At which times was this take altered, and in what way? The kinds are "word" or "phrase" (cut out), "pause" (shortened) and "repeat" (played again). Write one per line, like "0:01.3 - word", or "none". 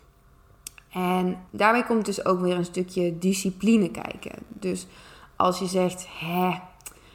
0:01.4 - word